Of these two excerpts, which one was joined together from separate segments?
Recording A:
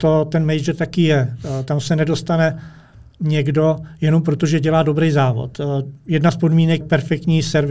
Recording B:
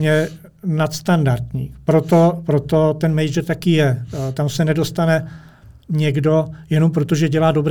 A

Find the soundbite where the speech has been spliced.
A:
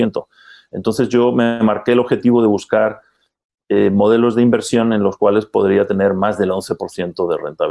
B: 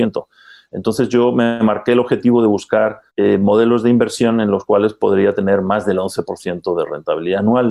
B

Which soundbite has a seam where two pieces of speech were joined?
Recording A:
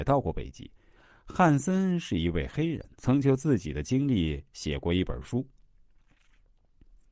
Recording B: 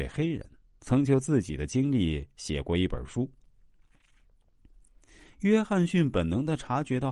A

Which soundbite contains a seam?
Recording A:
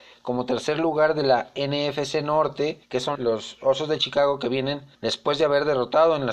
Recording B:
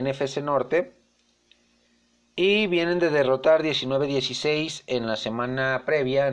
A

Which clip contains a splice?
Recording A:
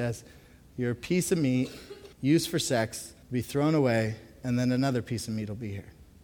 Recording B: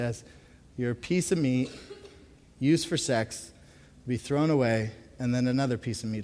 A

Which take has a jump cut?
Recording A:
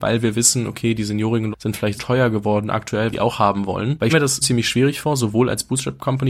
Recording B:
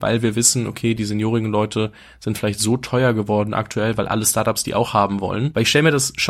A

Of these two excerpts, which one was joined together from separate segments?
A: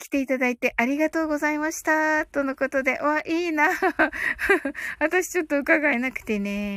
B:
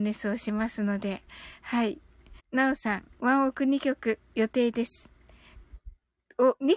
B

